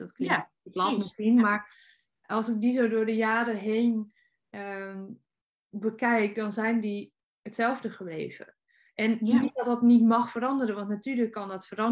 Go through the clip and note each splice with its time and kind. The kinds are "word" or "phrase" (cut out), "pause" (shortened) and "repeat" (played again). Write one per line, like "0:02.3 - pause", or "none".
none